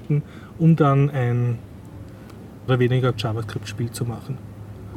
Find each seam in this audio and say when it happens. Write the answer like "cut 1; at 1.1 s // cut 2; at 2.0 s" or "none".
cut 1; at 2.7 s // cut 2; at 3.1 s